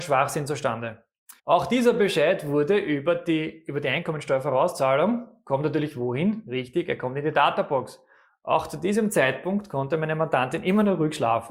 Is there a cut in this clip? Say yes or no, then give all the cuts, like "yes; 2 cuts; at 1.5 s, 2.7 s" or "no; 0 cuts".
yes; 1 cut; at 1.4 s